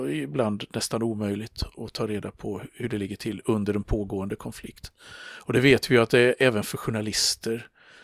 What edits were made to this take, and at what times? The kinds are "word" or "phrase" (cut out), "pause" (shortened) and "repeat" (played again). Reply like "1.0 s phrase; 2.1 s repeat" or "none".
none